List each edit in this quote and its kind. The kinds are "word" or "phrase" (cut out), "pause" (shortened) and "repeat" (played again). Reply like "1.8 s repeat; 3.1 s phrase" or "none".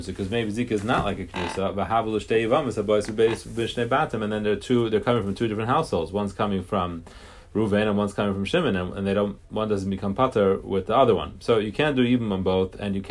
none